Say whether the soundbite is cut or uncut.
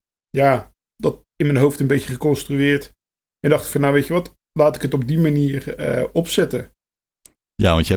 uncut